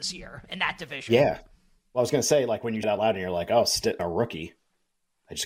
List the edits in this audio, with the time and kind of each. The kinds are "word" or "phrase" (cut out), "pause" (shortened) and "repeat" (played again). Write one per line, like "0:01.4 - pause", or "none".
0:02.8 - word
0:04.0 - phrase